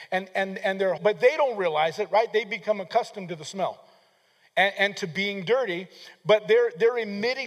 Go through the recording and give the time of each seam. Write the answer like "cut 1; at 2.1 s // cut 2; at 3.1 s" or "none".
cut 1; at 1.0 s